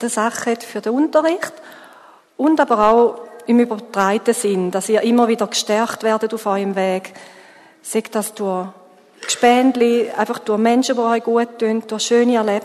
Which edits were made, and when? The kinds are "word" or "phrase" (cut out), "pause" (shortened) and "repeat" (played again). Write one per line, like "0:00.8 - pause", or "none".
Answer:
none